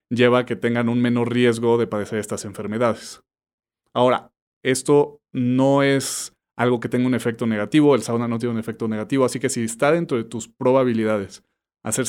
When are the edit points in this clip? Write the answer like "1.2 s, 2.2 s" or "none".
none